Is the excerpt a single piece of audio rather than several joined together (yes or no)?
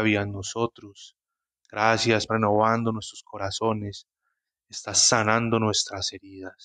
no